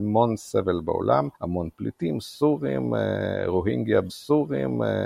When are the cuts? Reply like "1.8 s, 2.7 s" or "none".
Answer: 1.3 s, 4.1 s